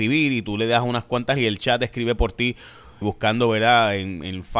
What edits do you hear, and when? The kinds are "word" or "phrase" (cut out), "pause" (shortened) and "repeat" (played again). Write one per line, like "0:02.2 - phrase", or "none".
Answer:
0:01.4 - word
0:03.0 - word

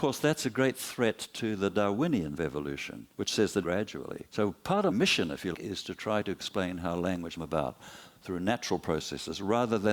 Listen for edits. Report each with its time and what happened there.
0:02.4 - phrase
0:03.1 - pause
0:03.6 - phrase
0:04.3 - pause
0:04.9 - phrase
0:05.5 - word
0:07.4 - phrase

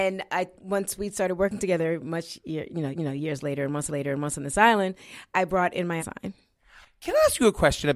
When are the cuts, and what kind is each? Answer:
0:02.9 - repeat
0:03.9 - repeat
0:06.0 - phrase

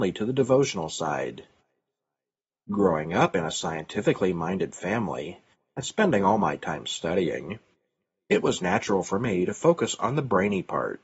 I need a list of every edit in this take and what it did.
none

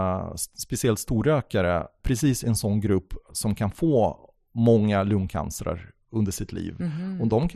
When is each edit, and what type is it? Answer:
0:02.0 - word

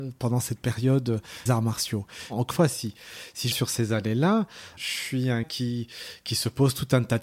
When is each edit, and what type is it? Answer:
0:01.5 - word
0:02.5 - word
0:03.5 - word
0:04.8 - word
0:05.4 - word

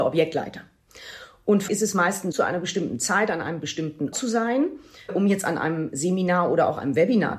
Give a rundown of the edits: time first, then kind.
0:01.7 - word
0:02.3 - word
0:04.1 - word
0:05.1 - word

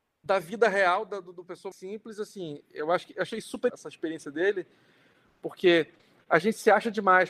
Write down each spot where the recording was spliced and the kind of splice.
0:01.7 - word
0:03.7 - phrase

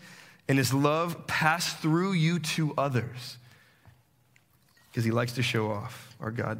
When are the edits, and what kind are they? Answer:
none

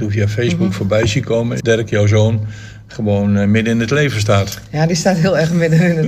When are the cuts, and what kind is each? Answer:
0:01.6 - phrase

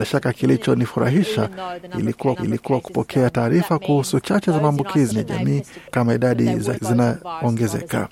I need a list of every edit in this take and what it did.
0:02.4 - repeat
0:04.2 - word
0:05.1 - word
0:05.9 - word
0:06.8 - word

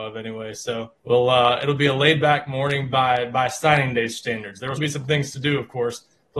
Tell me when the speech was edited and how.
0:01.0 - pause
0:04.8 - word

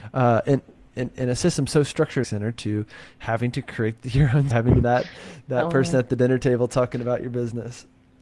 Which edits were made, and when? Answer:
0:02.2 - phrase
0:04.5 - word
0:04.8 - word

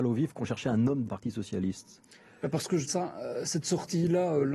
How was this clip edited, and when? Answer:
0:01.0 - word
0:02.9 - word

